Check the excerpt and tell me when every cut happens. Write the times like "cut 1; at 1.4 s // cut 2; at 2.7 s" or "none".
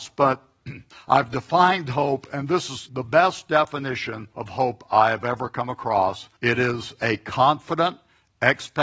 cut 1; at 0.9 s // cut 2; at 2.9 s // cut 3; at 4.3 s // cut 4; at 6.4 s

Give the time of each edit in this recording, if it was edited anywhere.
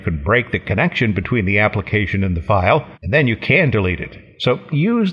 cut 1; at 2.9 s

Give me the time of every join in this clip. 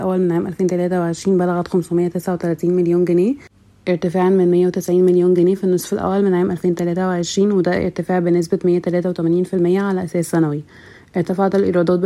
none

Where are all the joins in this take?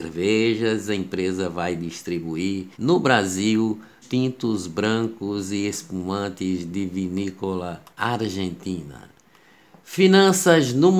cut 1; at 2.7 s // cut 2; at 4.0 s // cut 3; at 7.9 s

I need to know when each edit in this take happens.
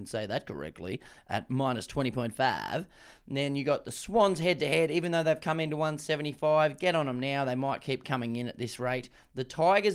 none

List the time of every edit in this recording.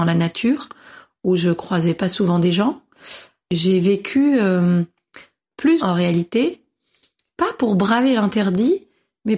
cut 1; at 5.8 s

